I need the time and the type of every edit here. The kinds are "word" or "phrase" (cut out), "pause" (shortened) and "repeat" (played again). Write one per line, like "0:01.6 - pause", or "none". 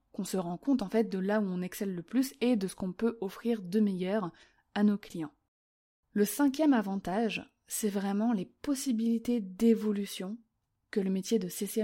none